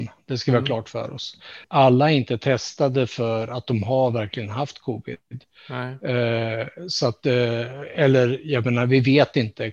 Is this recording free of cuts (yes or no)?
no